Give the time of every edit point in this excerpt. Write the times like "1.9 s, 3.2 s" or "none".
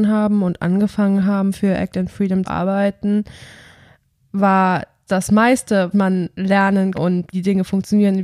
2.5 s, 5.1 s, 5.9 s, 6.9 s, 7.3 s